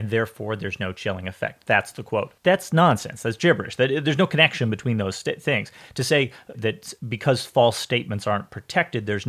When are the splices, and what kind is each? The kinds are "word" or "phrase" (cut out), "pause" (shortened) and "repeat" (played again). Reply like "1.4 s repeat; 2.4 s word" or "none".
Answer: 2.4 s pause; 6.5 s word; 7.0 s pause